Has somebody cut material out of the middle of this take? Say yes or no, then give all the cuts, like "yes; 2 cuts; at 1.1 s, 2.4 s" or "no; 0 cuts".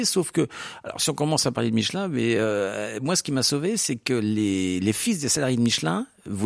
no; 0 cuts